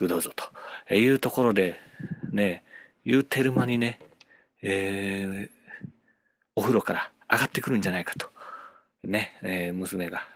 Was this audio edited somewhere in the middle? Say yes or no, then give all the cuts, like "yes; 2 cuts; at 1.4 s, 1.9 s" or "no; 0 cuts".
no; 0 cuts